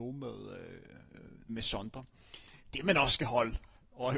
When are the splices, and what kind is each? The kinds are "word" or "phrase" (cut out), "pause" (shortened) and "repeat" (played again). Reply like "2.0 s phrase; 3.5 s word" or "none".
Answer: 1.5 s word